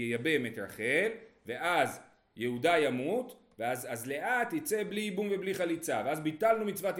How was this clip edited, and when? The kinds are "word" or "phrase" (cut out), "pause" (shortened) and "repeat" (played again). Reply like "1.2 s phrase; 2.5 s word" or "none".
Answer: none